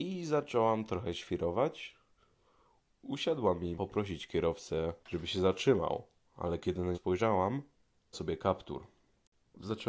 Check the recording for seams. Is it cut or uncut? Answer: cut